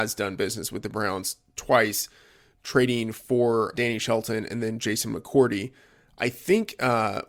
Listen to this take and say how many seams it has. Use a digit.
1